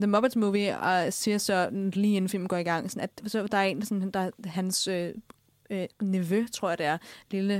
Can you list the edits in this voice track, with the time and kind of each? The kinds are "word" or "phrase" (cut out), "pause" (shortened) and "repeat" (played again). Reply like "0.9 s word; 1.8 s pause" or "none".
none